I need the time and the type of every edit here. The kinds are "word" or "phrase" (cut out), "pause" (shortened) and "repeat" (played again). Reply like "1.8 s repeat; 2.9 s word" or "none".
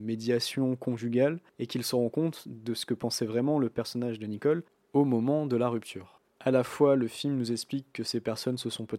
1.5 s pause; 6.3 s pause